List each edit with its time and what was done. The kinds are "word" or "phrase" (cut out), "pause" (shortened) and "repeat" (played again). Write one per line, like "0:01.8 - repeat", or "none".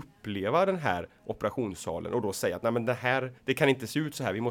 0:03.4 - pause